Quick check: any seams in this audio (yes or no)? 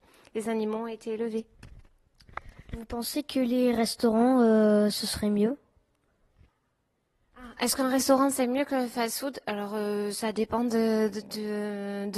no